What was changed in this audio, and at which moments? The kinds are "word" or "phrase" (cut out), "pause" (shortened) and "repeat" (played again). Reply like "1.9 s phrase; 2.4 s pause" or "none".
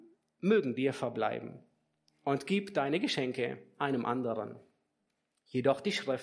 none